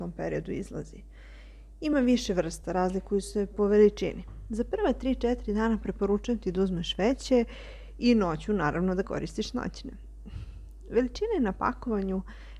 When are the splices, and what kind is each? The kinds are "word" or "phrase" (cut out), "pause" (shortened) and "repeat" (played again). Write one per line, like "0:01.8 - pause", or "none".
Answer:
none